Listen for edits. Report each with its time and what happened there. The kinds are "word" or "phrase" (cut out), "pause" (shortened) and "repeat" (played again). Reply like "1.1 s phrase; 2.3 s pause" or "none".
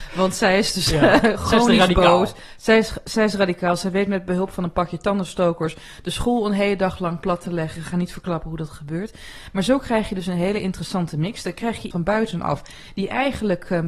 11.9 s word